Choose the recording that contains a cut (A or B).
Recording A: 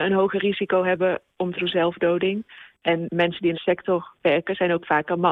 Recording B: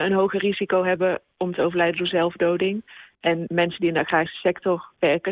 A